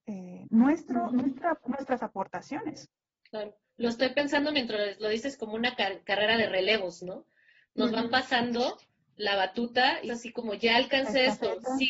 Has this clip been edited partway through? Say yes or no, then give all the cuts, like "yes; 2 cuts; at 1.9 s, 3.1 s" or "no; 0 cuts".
yes; 1 cut; at 10.1 s